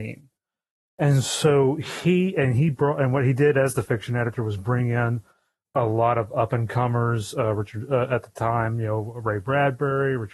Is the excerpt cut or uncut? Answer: uncut